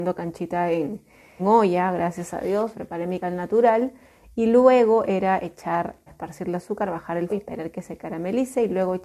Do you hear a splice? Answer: yes; 5 cuts; at 1.4 s, 2.7 s, 3.2 s, 6.1 s, 7.3 s

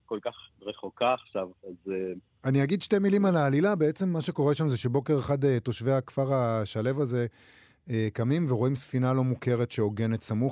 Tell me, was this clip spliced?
no; 0 cuts

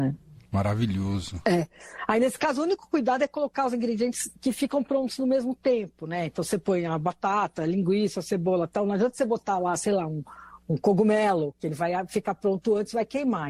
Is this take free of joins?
yes; 0 cuts

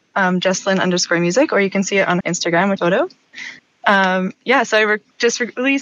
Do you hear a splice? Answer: yes; 3 cuts; at 2.2 s, 2.8 s, 3.6 s

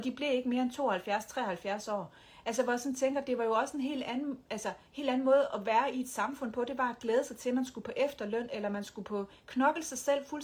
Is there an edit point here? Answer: yes; 1 cut; at 4.9 s

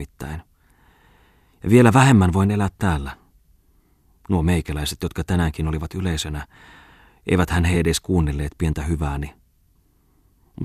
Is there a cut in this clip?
no; 0 cuts

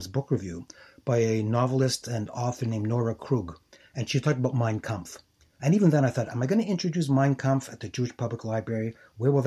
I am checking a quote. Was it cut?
no; 0 cuts

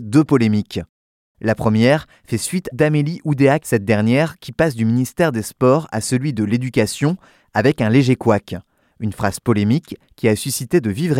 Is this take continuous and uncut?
no; 2 cuts; at 2.7 s, 3.6 s

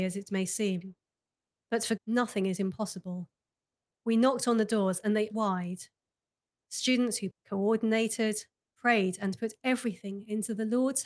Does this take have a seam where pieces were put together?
yes; 3 cuts; at 2.0 s, 5.3 s, 7.3 s

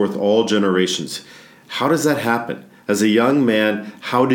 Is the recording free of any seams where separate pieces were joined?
yes; 0 cuts

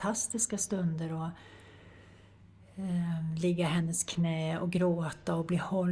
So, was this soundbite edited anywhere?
no; 0 cuts

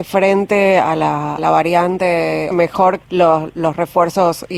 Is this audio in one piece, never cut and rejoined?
no; 3 cuts; at 1.4 s, 2.5 s, 3.0 s

